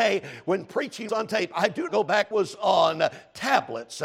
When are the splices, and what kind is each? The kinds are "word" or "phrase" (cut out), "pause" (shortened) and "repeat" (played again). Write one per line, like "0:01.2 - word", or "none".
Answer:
0:01.1 - word
0:01.9 - word
0:02.3 - phrase